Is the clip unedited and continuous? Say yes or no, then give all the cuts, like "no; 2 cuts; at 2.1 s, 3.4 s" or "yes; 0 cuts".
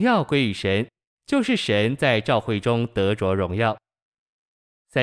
yes; 0 cuts